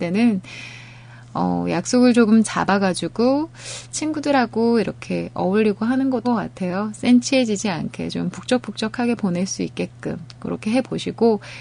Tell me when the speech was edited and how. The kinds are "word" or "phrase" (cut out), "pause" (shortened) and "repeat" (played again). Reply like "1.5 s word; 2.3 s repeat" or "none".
6.2 s word